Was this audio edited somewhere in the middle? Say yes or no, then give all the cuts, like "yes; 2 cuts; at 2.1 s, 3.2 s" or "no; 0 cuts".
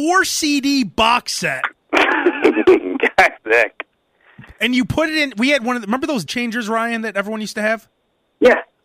yes; 2 cuts; at 3.4 s, 6.3 s